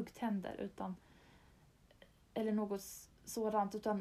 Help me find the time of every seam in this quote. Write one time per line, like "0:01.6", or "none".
none